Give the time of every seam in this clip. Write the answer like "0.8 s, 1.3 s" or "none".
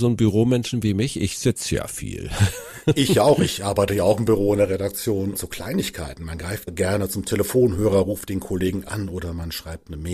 5.3 s, 6.7 s